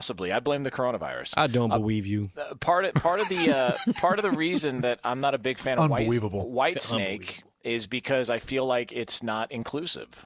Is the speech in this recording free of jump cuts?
yes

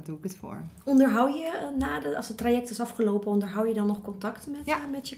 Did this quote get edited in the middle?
no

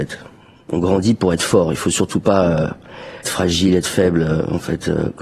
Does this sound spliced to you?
yes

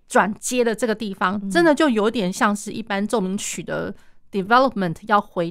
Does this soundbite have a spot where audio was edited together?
no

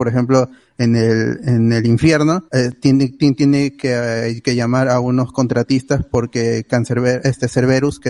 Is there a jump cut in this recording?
yes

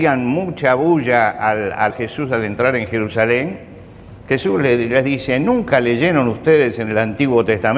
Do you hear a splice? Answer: yes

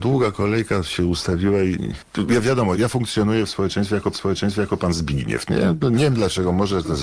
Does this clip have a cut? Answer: yes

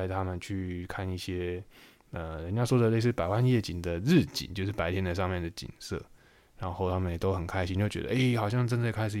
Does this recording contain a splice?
no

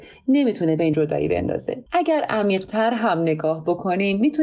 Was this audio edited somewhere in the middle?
yes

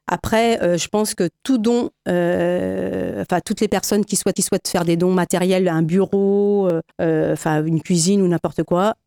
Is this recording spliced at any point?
yes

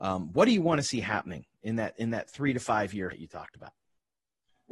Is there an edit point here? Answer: yes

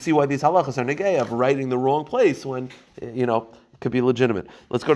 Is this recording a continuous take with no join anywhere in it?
yes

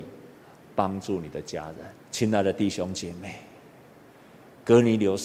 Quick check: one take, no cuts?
no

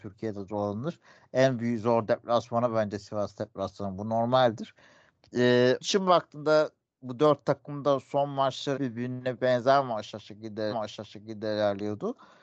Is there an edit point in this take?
yes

